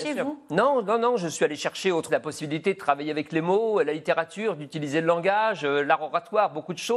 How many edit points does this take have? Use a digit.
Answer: 1